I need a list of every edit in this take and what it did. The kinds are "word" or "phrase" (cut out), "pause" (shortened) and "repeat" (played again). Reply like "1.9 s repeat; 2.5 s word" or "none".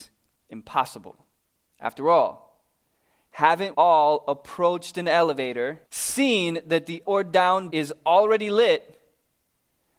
1.4 s pause; 3.7 s word; 5.9 s pause; 7.0 s word; 7.7 s word

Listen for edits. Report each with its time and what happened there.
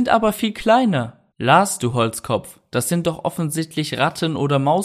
1.3 s pause

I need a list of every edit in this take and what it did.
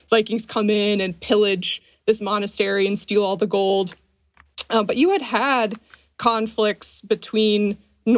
none

